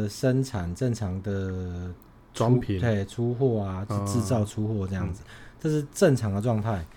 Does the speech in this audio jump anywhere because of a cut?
no; 0 cuts

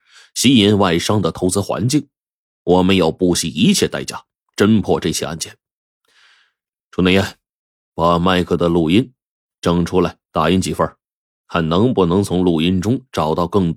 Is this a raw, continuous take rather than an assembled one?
yes; 0 cuts

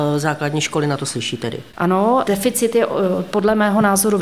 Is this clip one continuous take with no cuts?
no; 1 cut; at 1.7 s

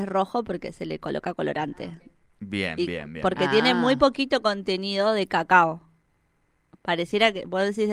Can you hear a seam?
no; 0 cuts

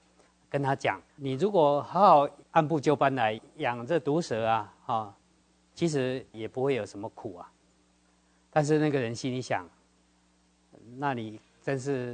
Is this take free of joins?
no; 3 cuts; at 1.1 s, 4.8 s, 6.3 s

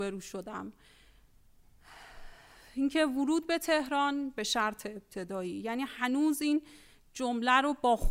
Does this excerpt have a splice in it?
no; 0 cuts

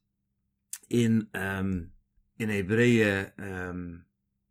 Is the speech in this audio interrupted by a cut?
yes; 1 cut; at 2.2 s

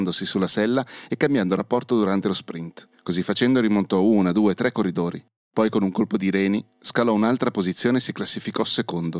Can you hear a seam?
yes; 1 cut; at 2.9 s

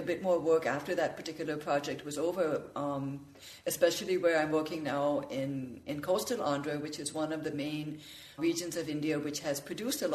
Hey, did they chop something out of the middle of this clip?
yes; 1 cut; at 8.4 s

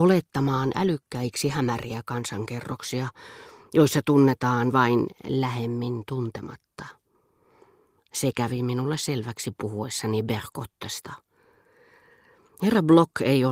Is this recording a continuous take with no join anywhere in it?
yes; 0 cuts

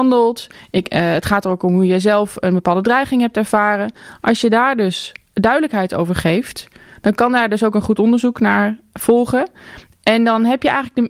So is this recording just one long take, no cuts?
yes; 0 cuts

